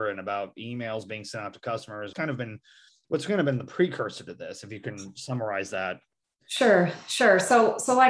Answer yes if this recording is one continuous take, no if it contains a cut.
no